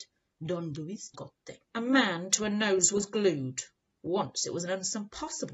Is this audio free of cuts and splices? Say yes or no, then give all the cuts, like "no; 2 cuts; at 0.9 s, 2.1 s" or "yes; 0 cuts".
no; 2 cuts; at 1.1 s, 1.6 s